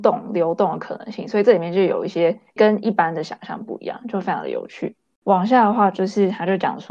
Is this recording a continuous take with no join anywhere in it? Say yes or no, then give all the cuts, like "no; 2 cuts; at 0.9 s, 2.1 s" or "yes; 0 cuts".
no; 1 cut; at 2.6 s